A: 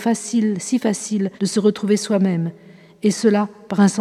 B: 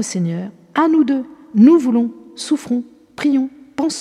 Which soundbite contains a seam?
A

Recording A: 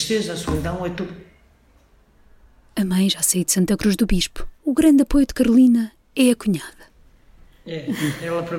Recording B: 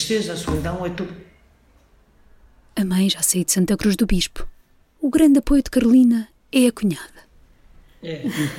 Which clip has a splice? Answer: A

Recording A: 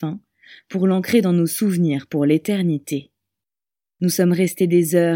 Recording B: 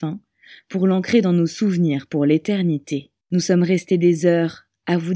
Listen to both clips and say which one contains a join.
B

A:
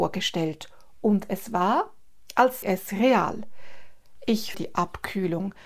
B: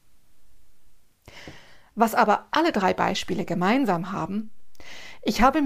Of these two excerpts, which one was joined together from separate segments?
A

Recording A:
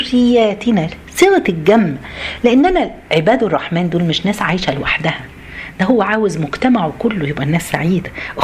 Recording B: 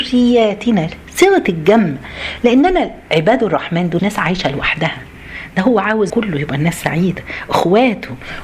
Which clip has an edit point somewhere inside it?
B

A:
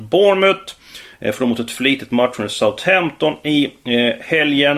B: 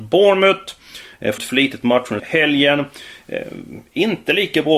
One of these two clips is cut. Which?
B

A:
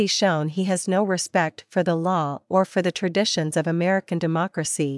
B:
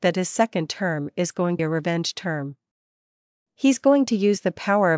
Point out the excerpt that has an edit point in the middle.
B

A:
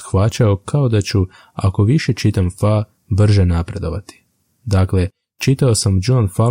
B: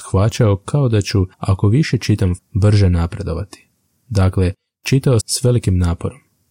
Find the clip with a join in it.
B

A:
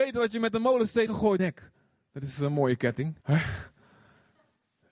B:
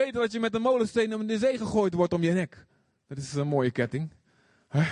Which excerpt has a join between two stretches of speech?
A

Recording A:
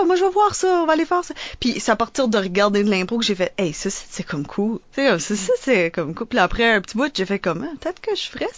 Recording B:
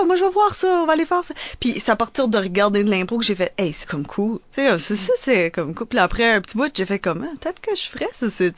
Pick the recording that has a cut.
B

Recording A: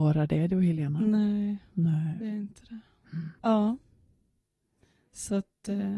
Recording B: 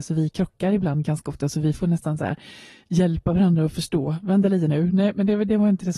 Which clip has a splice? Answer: A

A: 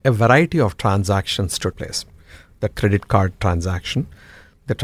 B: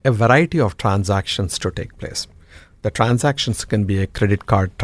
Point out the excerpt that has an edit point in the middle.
A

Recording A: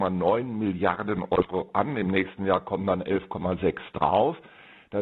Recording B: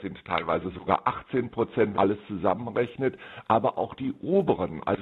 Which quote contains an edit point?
B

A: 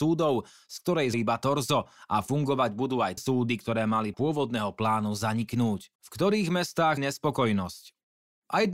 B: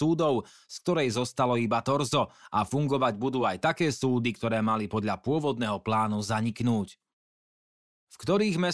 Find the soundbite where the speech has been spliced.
A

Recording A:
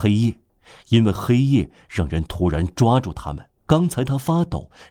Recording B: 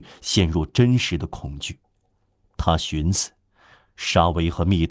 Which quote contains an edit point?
A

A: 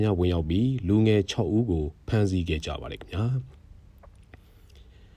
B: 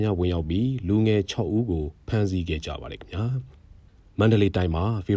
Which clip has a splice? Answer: B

